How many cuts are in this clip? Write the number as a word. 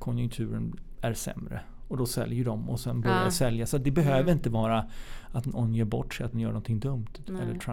one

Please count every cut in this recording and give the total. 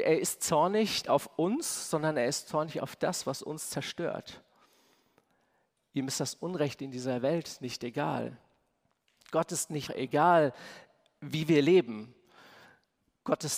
two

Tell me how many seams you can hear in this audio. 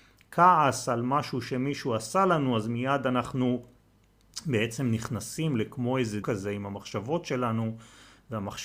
one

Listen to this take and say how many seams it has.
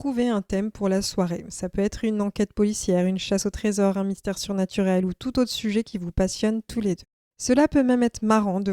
one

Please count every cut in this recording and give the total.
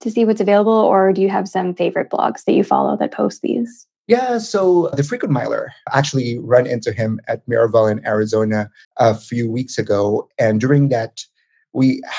one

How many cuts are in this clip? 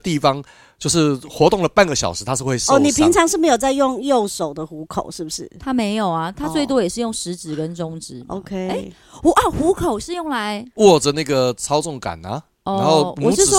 one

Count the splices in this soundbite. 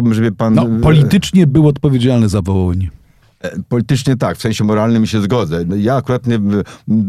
zero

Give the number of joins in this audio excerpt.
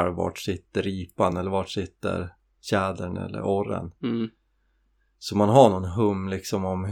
zero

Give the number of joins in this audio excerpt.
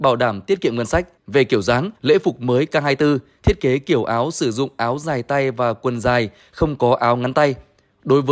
two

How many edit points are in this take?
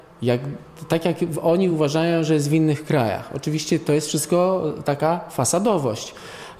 zero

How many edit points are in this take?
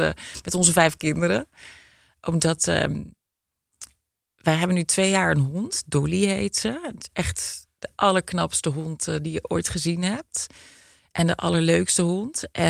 zero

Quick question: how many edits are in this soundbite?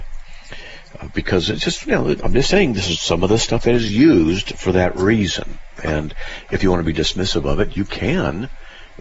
zero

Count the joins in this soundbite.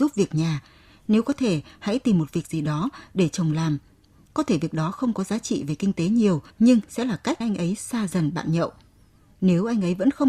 two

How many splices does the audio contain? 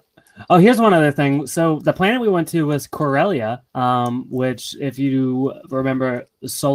one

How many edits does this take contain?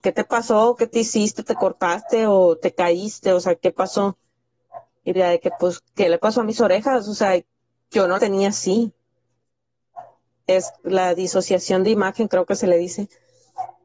three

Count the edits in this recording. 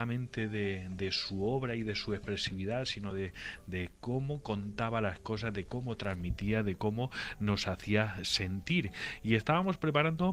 zero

